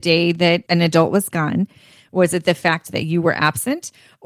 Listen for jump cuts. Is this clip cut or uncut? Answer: uncut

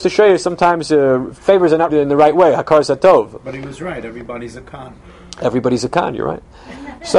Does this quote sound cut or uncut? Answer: cut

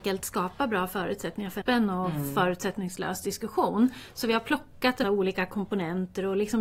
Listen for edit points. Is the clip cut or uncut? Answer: cut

